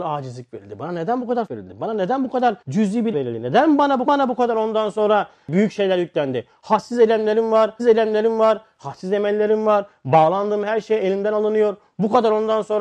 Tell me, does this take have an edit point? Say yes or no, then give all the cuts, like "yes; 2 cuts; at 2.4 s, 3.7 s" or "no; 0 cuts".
yes; 5 cuts; at 1.5 s, 2.6 s, 3.1 s, 4.1 s, 7.8 s